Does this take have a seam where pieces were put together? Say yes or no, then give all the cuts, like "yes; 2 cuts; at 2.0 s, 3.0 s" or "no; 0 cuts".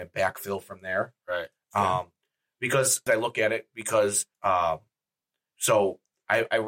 yes; 2 cuts; at 3.1 s, 4.3 s